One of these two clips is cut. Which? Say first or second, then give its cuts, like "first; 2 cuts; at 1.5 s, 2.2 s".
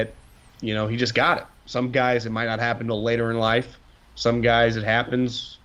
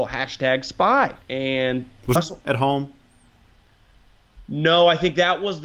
second; 2 cuts; at 1.2 s, 2.2 s